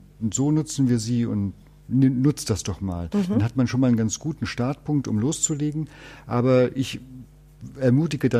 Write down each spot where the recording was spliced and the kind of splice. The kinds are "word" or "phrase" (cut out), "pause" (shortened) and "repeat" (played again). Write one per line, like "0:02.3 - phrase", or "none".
none